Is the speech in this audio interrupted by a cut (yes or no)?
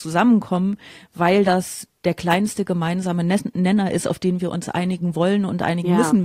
no